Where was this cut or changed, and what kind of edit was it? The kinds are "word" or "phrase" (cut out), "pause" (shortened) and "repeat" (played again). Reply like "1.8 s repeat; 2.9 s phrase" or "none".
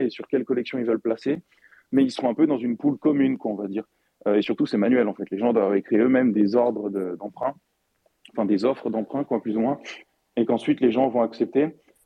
none

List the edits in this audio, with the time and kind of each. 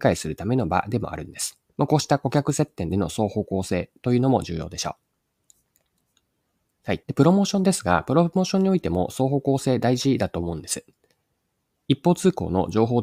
1.7 s pause; 7.0 s pause

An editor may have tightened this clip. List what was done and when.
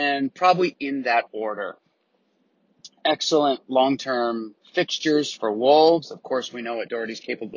4.6 s pause

